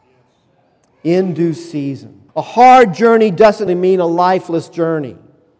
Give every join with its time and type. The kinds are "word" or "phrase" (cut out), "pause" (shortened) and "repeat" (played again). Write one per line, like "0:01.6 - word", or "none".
0:02.3 - pause
0:03.7 - word